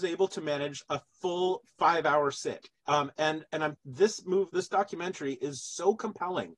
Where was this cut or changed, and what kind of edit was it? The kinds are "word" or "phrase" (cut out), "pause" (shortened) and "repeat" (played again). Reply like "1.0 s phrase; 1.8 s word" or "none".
2.8 s pause; 3.7 s phrase; 4.5 s word